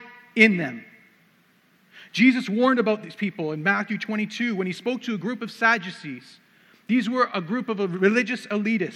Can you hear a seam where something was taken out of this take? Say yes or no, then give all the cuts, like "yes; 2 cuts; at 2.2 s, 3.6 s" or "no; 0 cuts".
no; 0 cuts